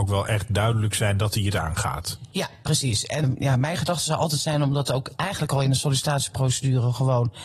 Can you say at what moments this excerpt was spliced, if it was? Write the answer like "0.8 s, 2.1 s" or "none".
3.2 s